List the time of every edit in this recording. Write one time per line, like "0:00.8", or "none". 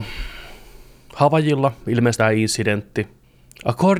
0:02.2